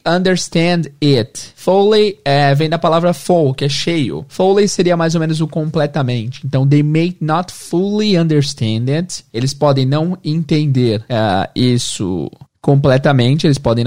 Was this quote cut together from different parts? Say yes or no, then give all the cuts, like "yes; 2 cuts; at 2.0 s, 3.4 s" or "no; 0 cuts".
no; 0 cuts